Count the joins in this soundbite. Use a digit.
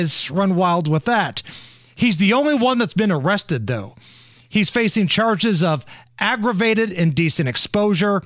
0